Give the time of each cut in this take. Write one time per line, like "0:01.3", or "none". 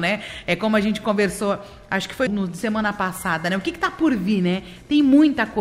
0:02.3